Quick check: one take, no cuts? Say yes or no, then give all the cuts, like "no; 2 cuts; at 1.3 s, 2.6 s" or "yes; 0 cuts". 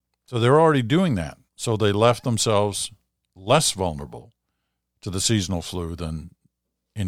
no; 1 cut; at 1.5 s